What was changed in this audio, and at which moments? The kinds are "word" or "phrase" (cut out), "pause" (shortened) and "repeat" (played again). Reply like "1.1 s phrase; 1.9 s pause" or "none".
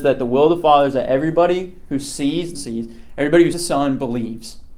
2.6 s word; 3.5 s word